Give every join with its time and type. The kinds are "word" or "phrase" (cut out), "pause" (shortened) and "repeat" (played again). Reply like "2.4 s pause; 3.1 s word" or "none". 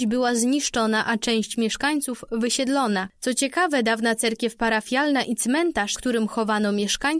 5.9 s word